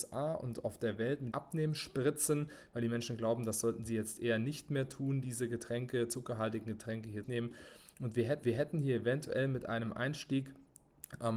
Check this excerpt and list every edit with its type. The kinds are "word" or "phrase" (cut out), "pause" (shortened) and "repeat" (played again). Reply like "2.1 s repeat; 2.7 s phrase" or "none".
1.3 s word; 7.2 s phrase; 8.4 s repeat